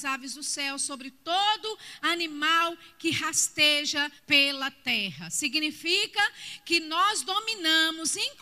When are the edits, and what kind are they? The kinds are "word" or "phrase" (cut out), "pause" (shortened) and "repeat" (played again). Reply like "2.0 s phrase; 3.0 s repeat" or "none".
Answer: 4.2 s pause